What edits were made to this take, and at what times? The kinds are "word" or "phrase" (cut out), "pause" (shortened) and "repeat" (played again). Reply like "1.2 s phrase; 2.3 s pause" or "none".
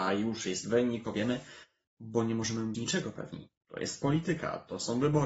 1.0 s word; 1.8 s pause; 2.7 s word